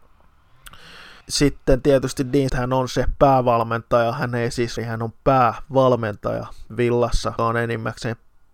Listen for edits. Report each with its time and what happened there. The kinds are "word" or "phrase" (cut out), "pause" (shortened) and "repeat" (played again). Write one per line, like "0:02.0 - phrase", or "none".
0:01.2 - pause
0:02.5 - word
0:04.8 - phrase
0:07.4 - word